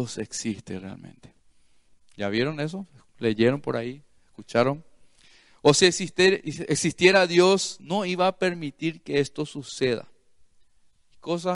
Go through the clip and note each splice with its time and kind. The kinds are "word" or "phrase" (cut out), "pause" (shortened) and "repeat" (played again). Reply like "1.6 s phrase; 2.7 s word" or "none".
none